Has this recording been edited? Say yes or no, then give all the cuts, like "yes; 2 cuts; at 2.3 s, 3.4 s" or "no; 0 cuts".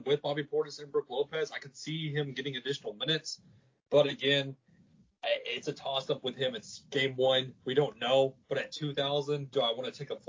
no; 0 cuts